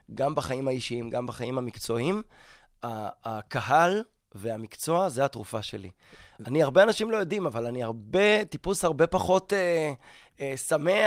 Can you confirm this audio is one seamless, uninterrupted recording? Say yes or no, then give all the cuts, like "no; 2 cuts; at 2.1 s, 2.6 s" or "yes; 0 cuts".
yes; 0 cuts